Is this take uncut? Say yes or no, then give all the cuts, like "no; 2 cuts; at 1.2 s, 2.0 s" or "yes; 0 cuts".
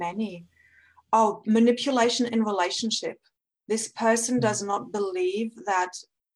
yes; 0 cuts